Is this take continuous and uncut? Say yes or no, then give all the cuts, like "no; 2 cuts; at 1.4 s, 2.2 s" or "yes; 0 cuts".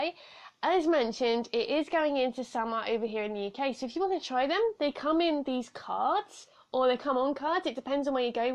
yes; 0 cuts